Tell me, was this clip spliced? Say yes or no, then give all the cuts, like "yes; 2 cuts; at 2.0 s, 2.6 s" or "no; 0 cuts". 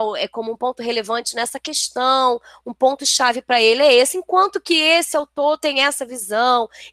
no; 0 cuts